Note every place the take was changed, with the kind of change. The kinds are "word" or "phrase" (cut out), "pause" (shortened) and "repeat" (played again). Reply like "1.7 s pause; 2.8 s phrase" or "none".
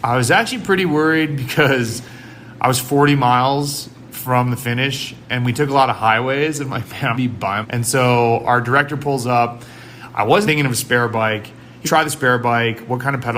7.1 s word; 7.6 s word; 10.4 s word; 11.8 s word